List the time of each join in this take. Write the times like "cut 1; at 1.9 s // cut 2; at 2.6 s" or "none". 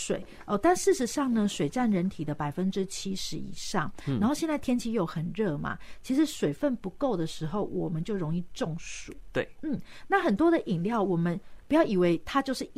none